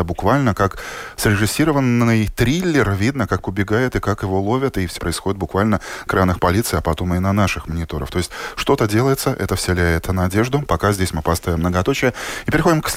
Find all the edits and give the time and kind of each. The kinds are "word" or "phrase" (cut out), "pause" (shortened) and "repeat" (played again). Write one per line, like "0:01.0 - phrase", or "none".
0:03.4 - word
0:05.0 - word
0:06.1 - word
0:06.4 - word